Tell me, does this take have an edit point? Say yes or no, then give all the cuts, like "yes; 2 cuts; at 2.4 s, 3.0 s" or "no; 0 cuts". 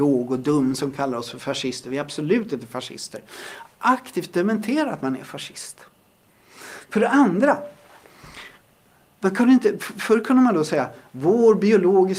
no; 0 cuts